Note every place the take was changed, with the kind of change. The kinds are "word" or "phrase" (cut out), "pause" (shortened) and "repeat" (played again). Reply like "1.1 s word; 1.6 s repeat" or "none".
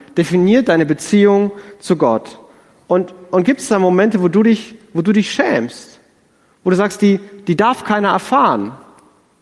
none